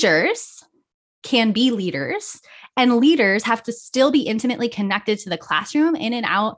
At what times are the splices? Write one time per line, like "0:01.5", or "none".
none